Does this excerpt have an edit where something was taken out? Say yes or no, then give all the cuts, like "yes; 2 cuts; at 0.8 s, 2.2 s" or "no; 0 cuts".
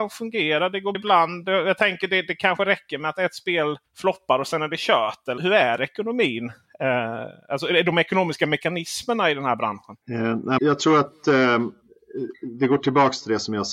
yes; 5 cuts; at 0.9 s, 3.9 s, 5.4 s, 10.0 s, 10.6 s